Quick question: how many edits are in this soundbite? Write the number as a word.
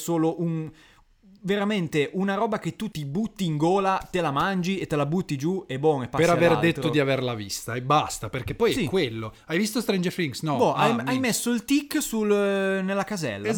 one